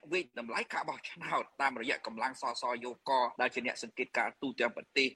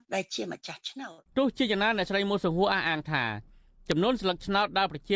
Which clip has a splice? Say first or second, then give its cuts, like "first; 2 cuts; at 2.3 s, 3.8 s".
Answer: second; 1 cut; at 1.3 s